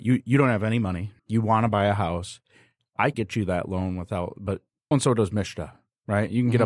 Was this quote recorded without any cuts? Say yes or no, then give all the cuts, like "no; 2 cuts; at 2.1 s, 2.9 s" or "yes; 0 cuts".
no; 3 cuts; at 1.2 s, 3.1 s, 4.9 s